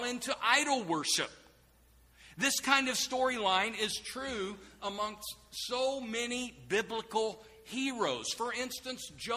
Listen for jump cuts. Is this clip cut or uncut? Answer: uncut